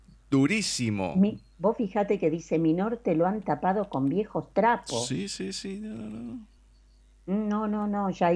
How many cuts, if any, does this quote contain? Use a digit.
0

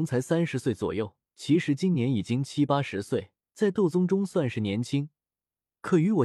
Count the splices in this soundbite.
2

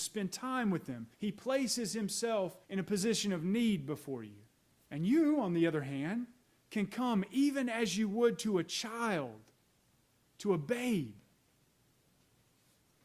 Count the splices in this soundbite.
3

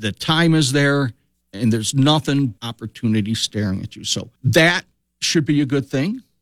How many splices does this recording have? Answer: 2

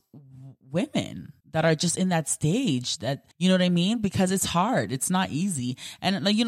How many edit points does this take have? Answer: 2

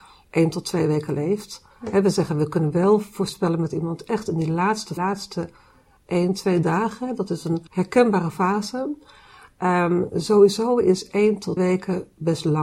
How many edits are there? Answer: 6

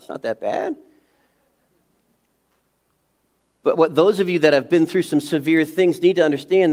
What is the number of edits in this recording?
0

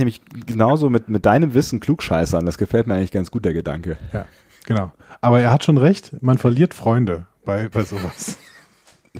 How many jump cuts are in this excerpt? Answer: 1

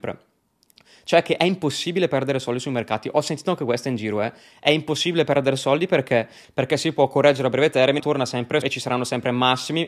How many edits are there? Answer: 2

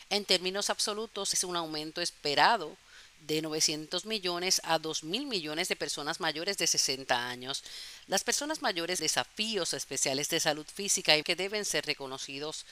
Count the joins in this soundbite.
3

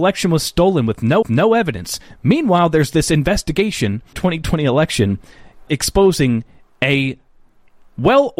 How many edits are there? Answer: 3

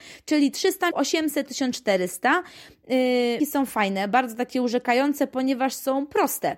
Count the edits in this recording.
3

